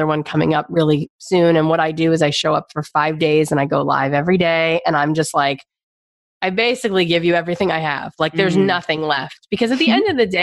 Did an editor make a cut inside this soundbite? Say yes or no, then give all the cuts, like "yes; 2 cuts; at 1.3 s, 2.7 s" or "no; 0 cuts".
no; 0 cuts